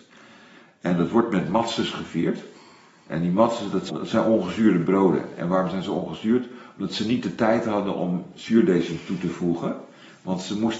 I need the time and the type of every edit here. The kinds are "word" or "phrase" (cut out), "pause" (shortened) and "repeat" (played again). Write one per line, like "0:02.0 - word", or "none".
0:03.9 - word